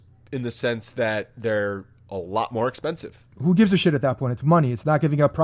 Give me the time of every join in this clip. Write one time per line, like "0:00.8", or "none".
0:03.3